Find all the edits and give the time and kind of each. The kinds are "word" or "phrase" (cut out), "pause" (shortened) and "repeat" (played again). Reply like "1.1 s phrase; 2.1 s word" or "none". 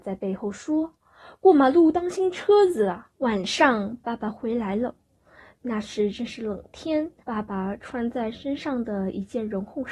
3.1 s pause; 7.2 s pause